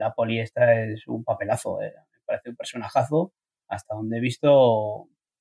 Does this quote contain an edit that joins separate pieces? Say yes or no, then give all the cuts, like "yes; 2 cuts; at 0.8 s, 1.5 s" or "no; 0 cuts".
no; 0 cuts